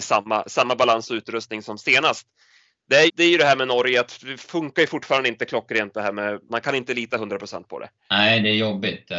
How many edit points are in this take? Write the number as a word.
two